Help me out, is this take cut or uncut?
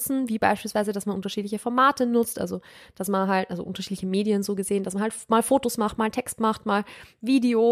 uncut